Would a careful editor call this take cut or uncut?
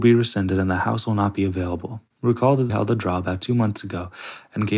cut